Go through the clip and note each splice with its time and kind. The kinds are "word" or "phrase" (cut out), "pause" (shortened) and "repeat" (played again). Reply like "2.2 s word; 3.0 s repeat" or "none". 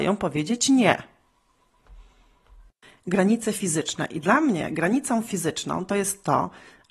none